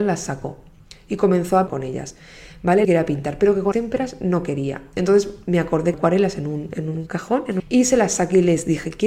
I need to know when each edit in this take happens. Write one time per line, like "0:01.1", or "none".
0:01.7
0:02.8
0:03.7
0:05.9
0:07.6